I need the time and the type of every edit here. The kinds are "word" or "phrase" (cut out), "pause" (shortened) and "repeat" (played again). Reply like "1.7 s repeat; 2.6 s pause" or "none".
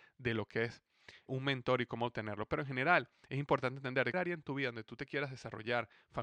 1.3 s word; 4.1 s word